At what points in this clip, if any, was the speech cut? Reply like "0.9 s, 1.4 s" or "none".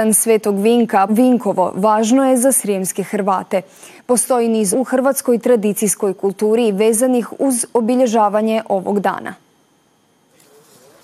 1.1 s, 4.7 s